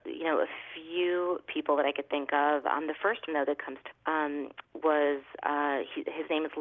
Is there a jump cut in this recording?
yes; 3 cuts; at 3.3 s, 3.9 s, 4.6 s

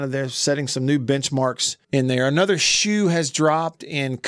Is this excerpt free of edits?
no; 1 cut; at 1.8 s

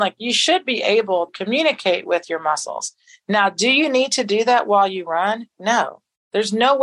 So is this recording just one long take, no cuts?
no; 1 cut; at 1.3 s

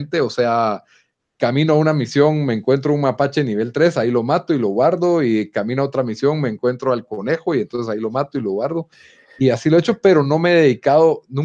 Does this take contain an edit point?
no; 0 cuts

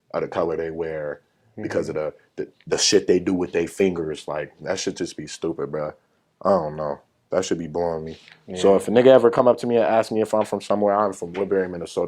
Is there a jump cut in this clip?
no; 0 cuts

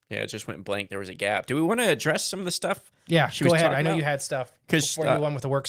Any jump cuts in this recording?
yes; 1 cut; at 3.0 s

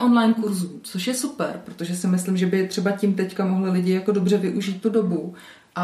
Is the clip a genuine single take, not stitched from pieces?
yes; 0 cuts

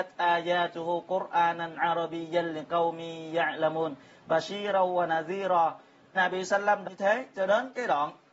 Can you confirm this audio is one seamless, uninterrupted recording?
no; 2 cuts; at 6.1 s, 6.8 s

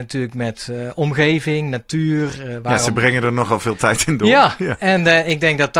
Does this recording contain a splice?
no; 0 cuts

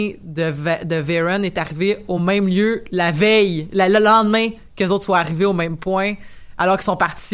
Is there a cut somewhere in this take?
no; 0 cuts

